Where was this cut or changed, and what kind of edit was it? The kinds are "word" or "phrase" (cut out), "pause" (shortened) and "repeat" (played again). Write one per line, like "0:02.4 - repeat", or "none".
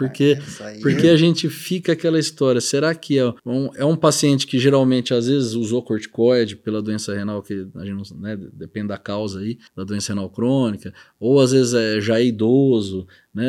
0:03.4 - pause
0:09.7 - pause